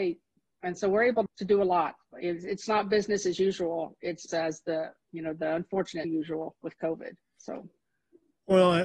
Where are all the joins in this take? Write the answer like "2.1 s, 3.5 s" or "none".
1.3 s, 4.3 s, 5.0 s, 6.0 s, 7.2 s